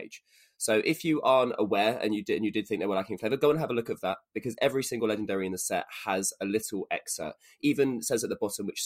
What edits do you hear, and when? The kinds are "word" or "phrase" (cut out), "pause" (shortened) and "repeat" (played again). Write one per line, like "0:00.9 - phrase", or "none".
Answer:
none